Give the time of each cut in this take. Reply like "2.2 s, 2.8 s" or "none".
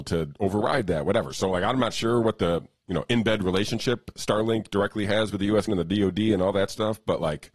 5.7 s